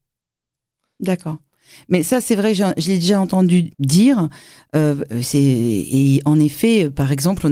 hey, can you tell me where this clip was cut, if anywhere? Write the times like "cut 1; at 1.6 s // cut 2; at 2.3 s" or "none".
cut 1; at 3.7 s